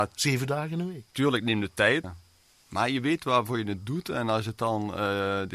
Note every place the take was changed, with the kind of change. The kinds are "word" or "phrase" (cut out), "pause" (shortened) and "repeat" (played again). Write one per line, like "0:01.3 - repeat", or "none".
0:02.0 - word